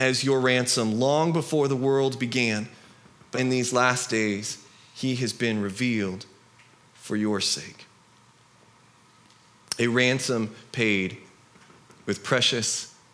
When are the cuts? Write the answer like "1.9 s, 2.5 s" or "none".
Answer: 3.3 s